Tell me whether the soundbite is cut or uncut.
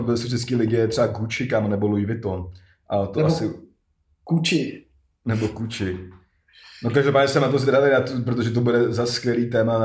uncut